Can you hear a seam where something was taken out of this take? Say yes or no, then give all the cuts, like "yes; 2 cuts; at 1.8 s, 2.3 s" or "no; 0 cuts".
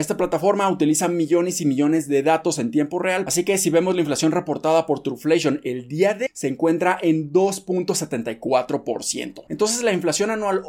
yes; 1 cut; at 6.3 s